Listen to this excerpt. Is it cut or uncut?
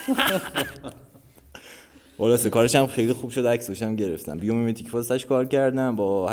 uncut